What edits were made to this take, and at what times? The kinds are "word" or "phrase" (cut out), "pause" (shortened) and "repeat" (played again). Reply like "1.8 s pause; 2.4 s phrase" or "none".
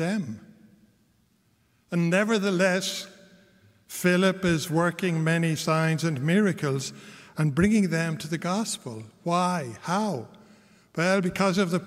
none